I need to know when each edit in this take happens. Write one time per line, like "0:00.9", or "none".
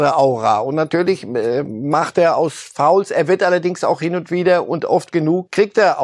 none

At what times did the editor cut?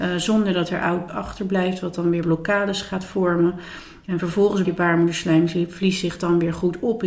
0:01.1
0:02.2
0:04.6

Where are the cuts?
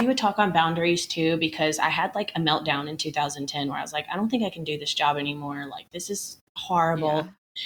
0:06.5

